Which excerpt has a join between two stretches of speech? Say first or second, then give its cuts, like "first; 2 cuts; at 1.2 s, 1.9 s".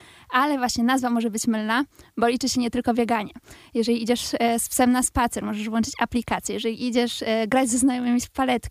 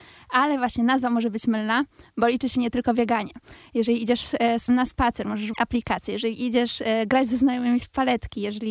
second; 2 cuts; at 4.7 s, 5.5 s